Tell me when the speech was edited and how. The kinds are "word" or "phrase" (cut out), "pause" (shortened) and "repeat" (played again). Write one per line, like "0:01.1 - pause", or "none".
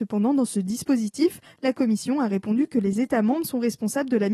none